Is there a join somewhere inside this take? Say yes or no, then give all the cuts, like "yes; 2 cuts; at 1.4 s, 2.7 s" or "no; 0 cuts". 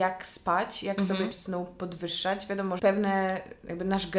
yes; 2 cuts; at 1.3 s, 2.8 s